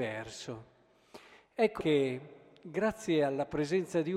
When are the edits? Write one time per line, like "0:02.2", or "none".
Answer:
0:01.8